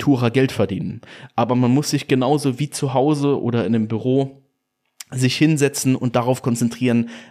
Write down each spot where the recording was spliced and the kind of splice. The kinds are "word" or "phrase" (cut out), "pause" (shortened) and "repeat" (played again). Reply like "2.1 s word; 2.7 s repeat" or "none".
none